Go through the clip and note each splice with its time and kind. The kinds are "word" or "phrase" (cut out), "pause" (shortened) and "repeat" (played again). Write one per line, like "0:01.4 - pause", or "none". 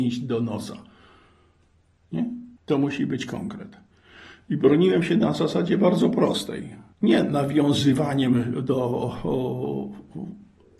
0:02.6 - pause
0:06.9 - pause